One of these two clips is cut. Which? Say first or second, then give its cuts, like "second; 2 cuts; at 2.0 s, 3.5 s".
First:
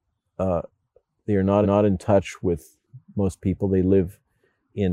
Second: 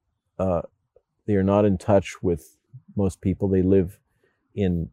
first; 1 cut; at 1.6 s